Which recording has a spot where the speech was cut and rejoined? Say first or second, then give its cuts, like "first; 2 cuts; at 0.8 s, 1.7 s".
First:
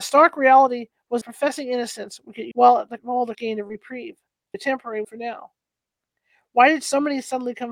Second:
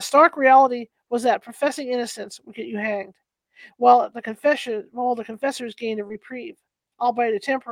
first; 6 cuts; at 1.2 s, 2.5 s, 3.0 s, 3.3 s, 4.5 s, 5.0 s